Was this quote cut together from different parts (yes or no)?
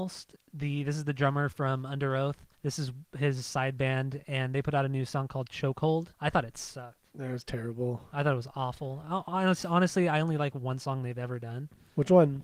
yes